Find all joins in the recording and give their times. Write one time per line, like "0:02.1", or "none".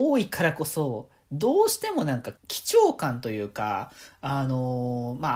0:02.4